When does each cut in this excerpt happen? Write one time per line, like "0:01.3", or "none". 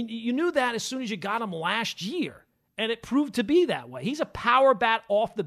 none